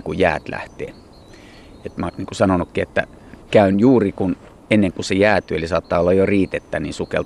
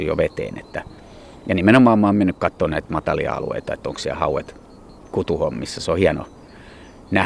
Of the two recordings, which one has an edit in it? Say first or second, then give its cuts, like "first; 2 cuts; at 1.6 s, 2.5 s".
first; 1 cut; at 2.1 s